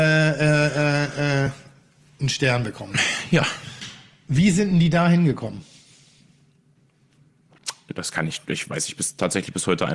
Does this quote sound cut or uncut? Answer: uncut